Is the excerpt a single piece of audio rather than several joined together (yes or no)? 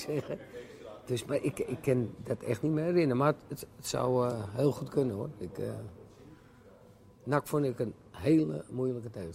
yes